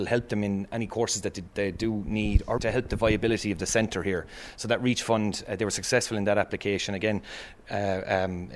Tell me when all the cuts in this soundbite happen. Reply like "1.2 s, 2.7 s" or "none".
2.6 s